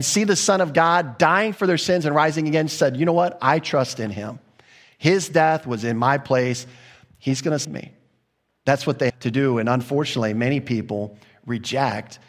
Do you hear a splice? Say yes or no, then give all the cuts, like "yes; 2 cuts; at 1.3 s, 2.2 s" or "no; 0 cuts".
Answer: yes; 2 cuts; at 7.6 s, 9.1 s